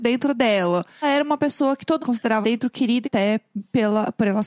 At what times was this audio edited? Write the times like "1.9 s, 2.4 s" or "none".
1.0 s, 2.0 s, 2.4 s, 3.0 s